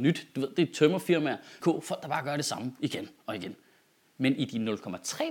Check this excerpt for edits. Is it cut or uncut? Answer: cut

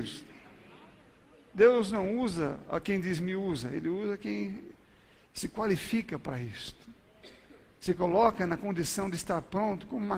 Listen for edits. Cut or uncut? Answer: uncut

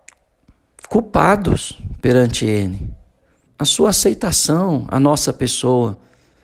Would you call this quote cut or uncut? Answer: cut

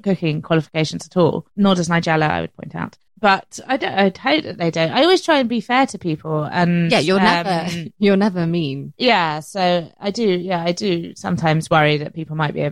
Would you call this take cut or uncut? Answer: cut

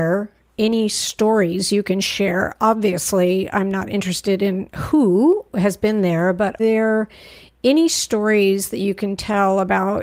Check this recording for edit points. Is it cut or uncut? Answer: cut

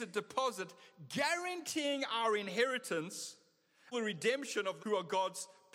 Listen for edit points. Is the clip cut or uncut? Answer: cut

